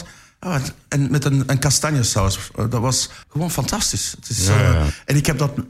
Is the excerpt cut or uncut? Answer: cut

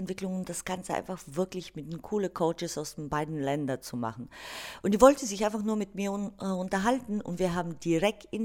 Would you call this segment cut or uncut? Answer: uncut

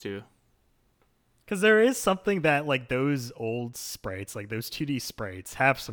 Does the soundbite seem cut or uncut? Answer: uncut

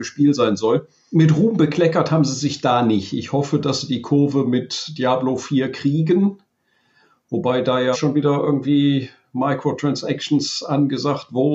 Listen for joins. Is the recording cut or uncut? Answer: cut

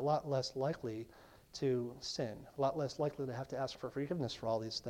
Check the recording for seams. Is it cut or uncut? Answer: uncut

